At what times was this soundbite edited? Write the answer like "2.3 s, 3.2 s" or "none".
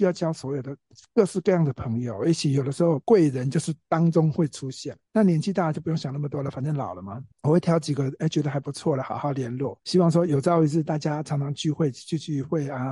3.0 s, 5.1 s, 7.3 s, 9.8 s